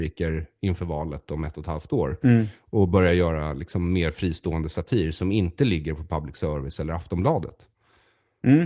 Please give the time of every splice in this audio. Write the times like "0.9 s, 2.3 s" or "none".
none